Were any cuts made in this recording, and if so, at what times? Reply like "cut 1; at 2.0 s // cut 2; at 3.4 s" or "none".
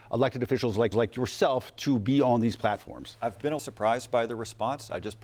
cut 1; at 0.9 s // cut 2; at 3.6 s